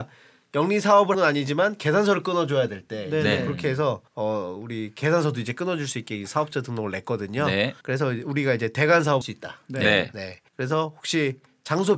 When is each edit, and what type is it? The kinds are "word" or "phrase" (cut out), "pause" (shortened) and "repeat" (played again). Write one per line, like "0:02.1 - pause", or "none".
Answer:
0:01.1 - word
0:04.1 - pause
0:07.8 - pause
0:09.2 - word
0:10.5 - pause